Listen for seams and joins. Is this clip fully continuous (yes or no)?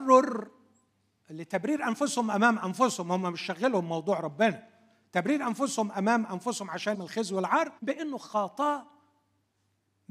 no